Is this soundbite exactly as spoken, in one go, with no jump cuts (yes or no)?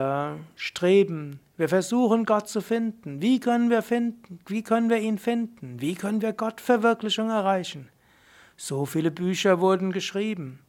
yes